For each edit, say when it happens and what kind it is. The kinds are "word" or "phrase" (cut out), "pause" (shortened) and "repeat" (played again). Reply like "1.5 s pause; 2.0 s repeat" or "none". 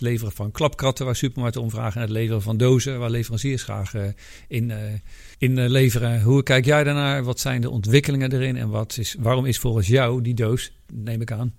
5.3 s pause